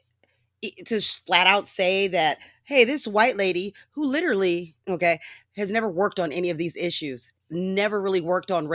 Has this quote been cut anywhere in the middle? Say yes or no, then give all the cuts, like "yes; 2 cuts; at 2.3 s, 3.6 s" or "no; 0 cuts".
yes; 1 cut; at 7.4 s